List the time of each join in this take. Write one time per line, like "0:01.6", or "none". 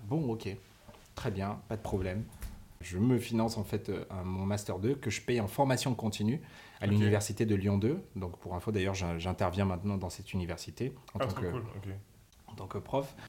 none